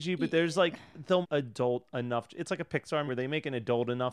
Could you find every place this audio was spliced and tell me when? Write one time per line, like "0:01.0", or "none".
0:01.2
0:03.1